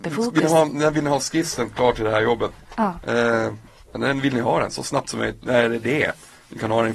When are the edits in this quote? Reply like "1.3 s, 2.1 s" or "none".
none